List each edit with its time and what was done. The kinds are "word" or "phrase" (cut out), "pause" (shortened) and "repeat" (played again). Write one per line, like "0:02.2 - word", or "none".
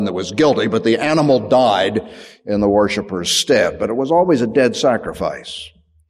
none